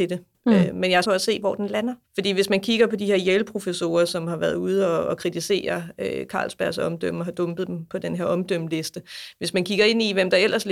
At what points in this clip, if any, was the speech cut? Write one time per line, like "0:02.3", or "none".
0:01.0
0:02.0